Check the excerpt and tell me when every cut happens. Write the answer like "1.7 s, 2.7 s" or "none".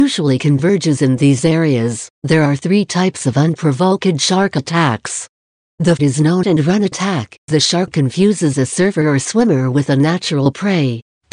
2.1 s, 6.0 s, 6.4 s, 7.5 s